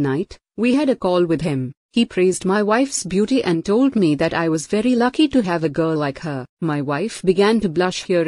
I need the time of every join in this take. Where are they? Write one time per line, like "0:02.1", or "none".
0:01.8
0:06.5